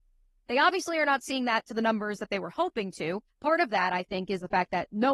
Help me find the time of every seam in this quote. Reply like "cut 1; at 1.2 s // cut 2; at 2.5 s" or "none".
cut 1; at 3.3 s